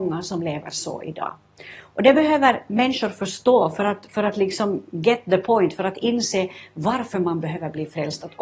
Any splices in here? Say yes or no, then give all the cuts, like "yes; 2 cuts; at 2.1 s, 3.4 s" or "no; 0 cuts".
no; 0 cuts